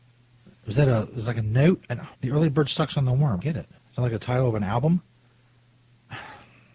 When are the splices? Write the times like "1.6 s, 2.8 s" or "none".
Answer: 2.1 s, 3.4 s, 3.8 s